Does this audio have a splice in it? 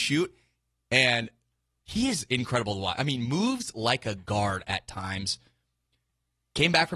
no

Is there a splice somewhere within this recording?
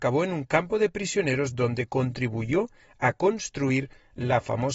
no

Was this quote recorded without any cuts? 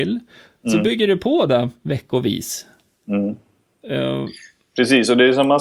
yes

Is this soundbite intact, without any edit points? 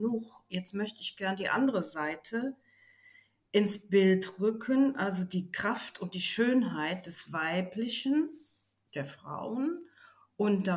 yes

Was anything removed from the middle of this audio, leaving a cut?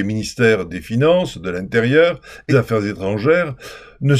yes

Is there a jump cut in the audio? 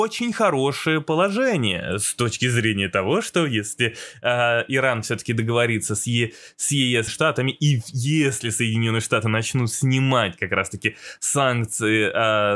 yes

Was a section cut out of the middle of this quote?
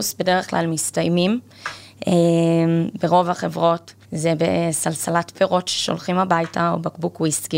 yes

